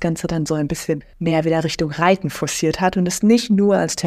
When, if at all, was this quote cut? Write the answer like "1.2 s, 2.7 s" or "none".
1.1 s